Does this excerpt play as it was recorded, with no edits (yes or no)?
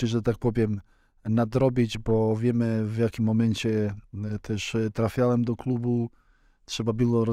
yes